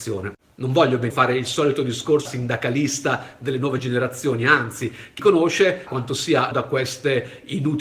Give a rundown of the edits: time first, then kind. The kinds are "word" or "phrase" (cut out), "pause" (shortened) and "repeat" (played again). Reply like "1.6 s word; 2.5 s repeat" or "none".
1.1 s word; 2.3 s word; 5.2 s word; 5.9 s word; 6.5 s word